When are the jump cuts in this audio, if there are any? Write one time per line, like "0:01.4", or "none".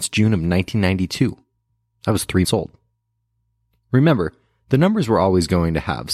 0:02.4